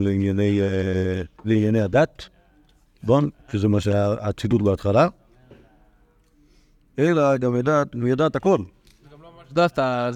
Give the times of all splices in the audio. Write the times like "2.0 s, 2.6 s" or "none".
1.4 s